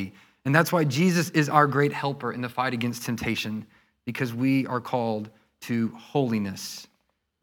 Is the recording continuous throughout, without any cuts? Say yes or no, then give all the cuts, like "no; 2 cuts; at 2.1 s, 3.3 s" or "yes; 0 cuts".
yes; 0 cuts